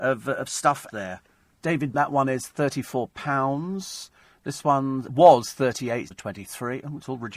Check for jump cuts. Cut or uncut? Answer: cut